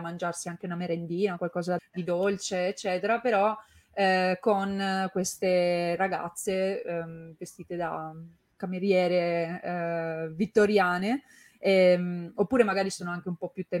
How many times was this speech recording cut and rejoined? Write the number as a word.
one